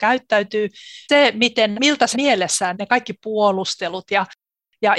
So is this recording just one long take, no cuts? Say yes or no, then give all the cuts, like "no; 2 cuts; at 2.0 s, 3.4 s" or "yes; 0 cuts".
no; 4 cuts; at 1.1 s, 1.7 s, 2.1 s, 2.7 s